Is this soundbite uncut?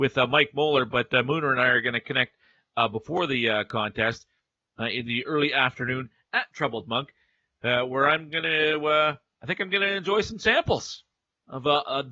yes; 0 cuts

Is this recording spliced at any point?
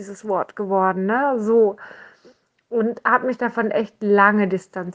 no; 0 cuts

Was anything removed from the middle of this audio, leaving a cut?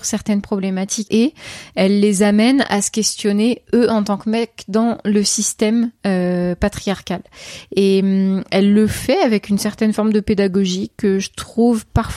yes; 1 cut; at 1.1 s

